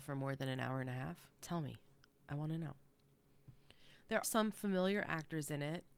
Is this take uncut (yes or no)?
no